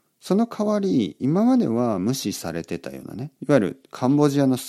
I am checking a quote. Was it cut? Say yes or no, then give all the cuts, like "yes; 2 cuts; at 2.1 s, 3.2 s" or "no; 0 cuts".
yes; 1 cut; at 3.3 s